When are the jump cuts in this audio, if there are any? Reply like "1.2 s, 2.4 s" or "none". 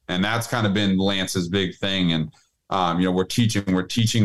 none